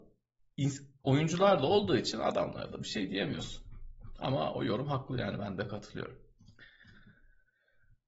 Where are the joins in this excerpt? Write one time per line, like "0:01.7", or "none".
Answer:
none